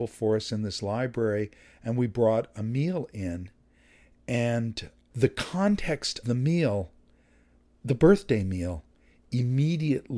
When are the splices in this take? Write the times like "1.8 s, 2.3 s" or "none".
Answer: 6.2 s